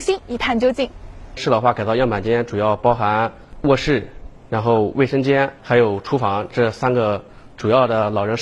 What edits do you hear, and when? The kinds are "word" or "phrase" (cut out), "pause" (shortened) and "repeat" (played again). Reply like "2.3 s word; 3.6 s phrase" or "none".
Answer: 5.6 s pause